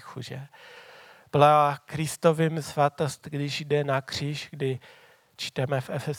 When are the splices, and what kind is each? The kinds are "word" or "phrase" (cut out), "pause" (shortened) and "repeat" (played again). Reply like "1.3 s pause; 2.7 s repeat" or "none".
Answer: 2.6 s word